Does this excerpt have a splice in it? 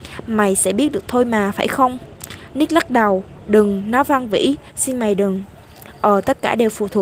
no; 0 cuts

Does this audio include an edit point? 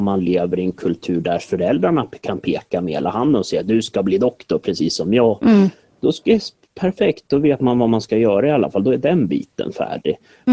no; 0 cuts

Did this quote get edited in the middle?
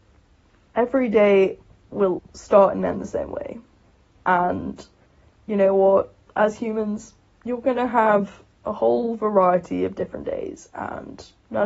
yes; 2 cuts; at 2.2 s, 6.3 s

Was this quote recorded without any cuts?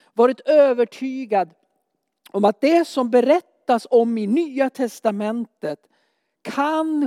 yes; 0 cuts

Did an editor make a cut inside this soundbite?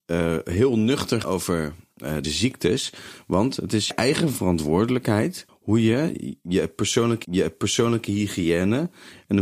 yes; 5 cuts; at 1.2 s, 2.2 s, 3.9 s, 5.5 s, 7.2 s

